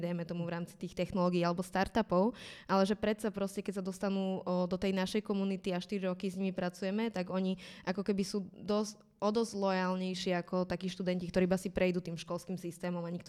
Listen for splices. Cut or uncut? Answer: uncut